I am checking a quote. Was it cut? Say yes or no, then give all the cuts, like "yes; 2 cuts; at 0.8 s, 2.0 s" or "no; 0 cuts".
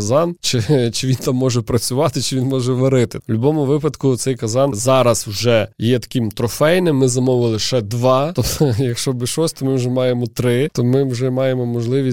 no; 0 cuts